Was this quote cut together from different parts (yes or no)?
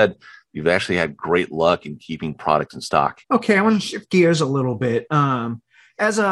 yes